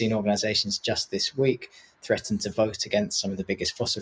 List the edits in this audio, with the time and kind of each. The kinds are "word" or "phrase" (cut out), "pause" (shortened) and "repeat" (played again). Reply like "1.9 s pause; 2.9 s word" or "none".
none